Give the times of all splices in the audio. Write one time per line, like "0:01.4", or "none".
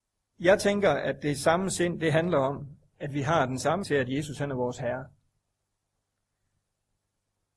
0:03.8